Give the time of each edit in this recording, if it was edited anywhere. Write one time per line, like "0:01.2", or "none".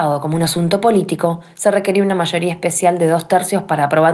none